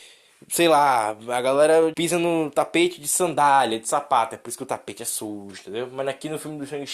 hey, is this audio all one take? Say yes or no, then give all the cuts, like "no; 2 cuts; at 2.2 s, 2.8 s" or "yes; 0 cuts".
no; 1 cut; at 1.9 s